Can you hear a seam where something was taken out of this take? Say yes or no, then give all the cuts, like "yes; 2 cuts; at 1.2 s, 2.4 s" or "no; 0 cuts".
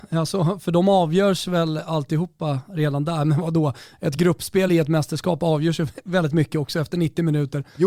no; 0 cuts